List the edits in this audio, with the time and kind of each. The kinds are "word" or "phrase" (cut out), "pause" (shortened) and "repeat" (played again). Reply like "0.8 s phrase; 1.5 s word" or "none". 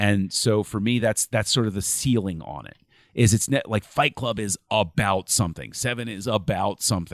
none

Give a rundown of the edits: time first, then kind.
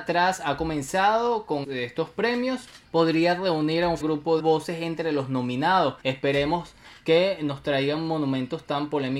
1.6 s word; 2.9 s pause; 4.0 s word; 4.4 s phrase; 6.0 s pause

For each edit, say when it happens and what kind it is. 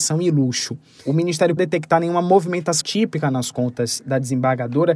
1.6 s phrase; 2.8 s word

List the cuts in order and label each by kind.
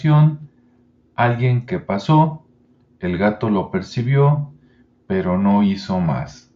none

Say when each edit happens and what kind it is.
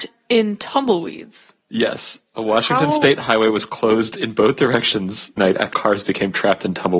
1.6 s pause; 5.4 s phrase; 5.7 s word

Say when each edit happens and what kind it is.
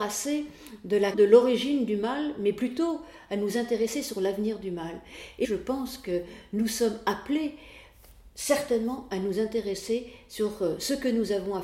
1.1 s word; 5.4 s word

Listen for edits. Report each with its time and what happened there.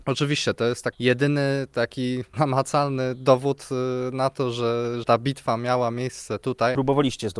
0.9 s word; 2.3 s word; 5.0 s word

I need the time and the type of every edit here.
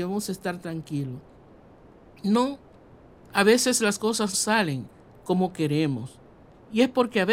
4.3 s word

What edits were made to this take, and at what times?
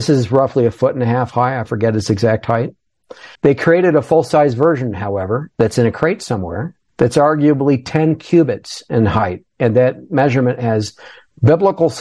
3.4 s pause; 5.5 s pause; 6.9 s pause

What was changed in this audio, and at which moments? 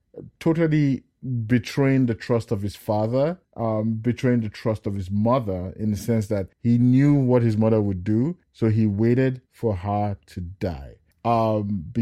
3.4 s pause; 6.5 s pause; 8.4 s pause; 9.5 s pause; 11.1 s pause

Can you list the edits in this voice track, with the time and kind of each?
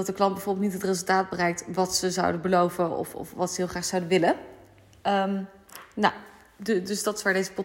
none

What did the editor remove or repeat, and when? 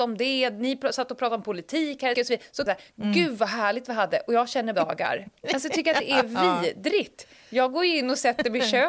2.1 s phrase; 2.7 s phrase; 4.7 s phrase

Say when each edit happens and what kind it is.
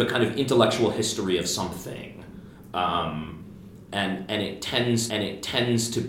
5.1 s repeat

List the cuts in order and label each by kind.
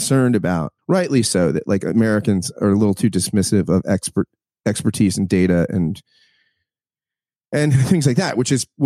none

